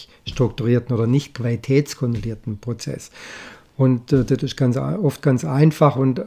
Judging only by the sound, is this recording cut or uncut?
uncut